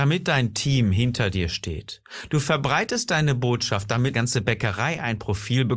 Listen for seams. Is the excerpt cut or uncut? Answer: cut